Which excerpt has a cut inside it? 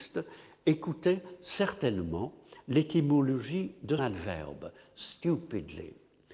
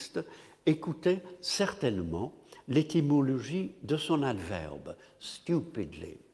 first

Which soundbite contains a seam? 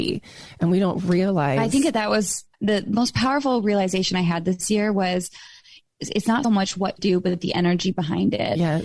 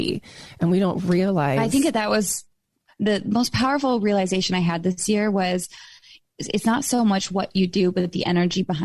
first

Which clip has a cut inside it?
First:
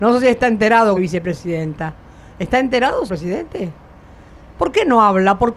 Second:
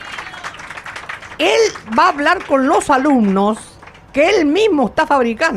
first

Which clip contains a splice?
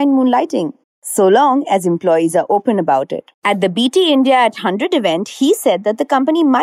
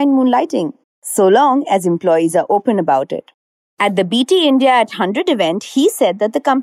first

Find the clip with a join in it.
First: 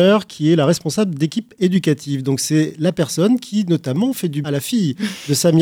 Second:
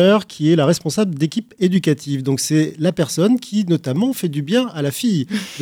first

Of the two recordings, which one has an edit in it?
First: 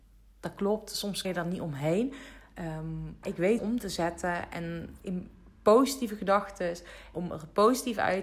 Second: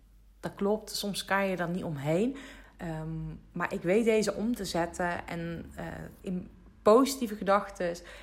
first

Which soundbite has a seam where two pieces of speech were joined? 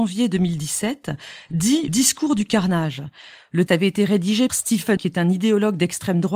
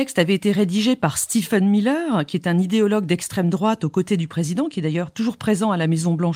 first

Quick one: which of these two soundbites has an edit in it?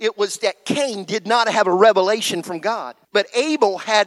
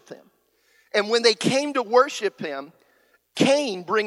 first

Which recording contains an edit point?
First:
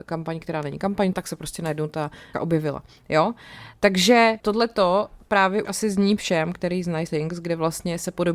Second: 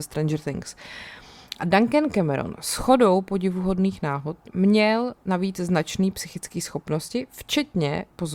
first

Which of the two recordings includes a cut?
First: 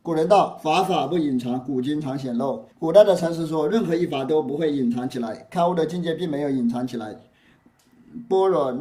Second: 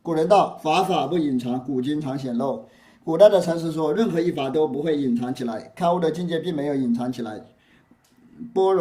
first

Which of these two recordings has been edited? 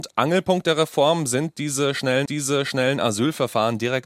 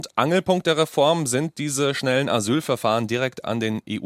first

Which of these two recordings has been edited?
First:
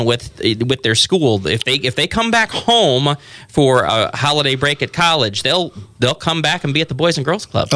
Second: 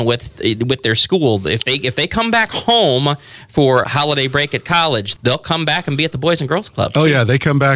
second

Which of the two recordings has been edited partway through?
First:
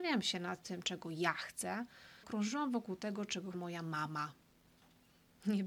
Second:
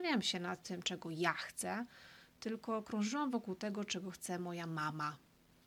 first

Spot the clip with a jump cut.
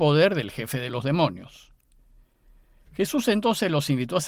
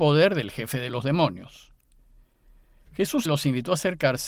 second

